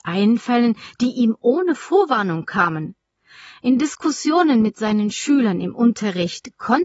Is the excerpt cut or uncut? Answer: uncut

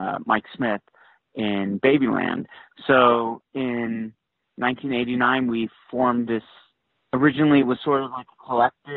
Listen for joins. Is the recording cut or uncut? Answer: uncut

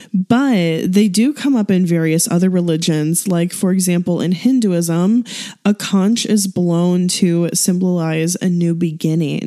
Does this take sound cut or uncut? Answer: uncut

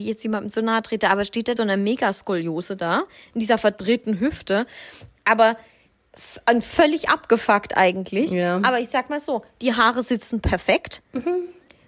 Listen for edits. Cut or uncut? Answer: cut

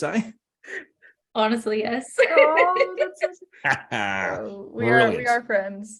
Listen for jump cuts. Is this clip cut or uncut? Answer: uncut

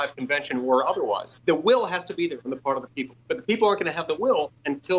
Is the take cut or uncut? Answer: cut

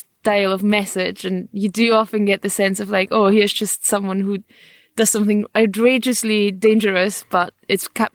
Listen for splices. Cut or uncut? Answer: uncut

